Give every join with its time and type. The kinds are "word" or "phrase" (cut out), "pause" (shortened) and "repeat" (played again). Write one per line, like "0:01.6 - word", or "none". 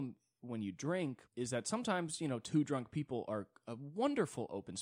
0:01.3 - pause